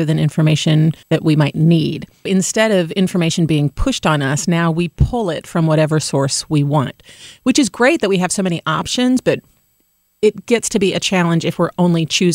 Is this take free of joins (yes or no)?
no